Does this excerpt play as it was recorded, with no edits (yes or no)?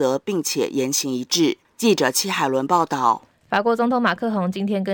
no